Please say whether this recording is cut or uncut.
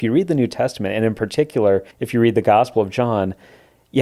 cut